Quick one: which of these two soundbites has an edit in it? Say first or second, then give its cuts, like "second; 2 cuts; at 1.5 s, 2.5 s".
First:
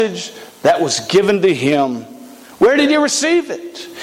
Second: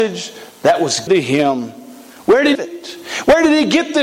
second; 2 cuts; at 1.1 s, 2.5 s